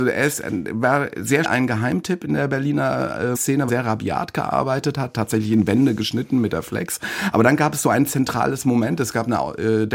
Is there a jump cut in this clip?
yes; 3 cuts; at 1.4 s, 3.3 s, 3.7 s

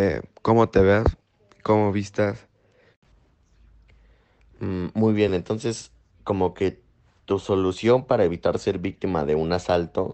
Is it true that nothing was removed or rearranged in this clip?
yes; 0 cuts

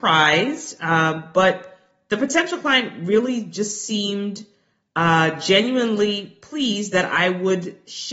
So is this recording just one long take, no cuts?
yes; 0 cuts

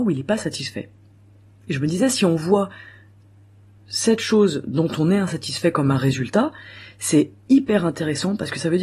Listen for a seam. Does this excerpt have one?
no; 0 cuts

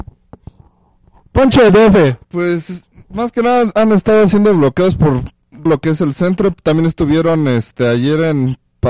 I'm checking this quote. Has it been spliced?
yes; 3 cuts; at 1.7 s, 2.2 s, 5.7 s

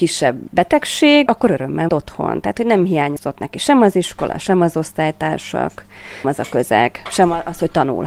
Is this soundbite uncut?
no; 3 cuts; at 1.3 s, 1.9 s, 6.2 s

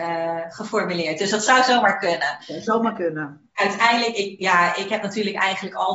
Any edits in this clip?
no; 0 cuts

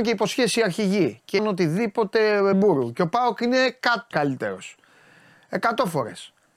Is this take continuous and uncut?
no; 3 cuts; at 1.4 s, 2.5 s, 4.1 s

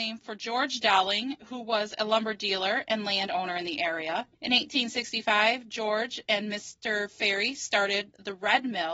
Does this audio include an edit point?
yes; 1 cut; at 4.3 s

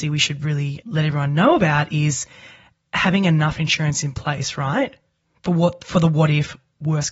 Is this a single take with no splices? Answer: yes; 0 cuts

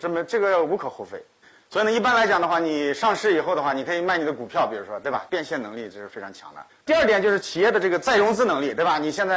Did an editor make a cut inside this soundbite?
yes; 2 cuts; at 1.4 s, 6.7 s

